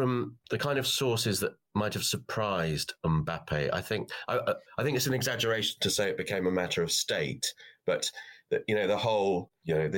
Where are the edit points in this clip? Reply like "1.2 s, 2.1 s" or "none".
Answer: none